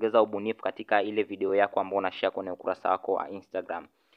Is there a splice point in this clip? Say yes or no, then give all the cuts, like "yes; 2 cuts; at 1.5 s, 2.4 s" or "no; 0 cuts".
no; 0 cuts